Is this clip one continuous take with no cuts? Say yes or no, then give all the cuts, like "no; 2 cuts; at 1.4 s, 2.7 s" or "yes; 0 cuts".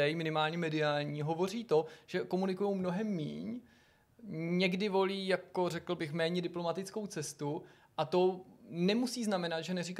yes; 0 cuts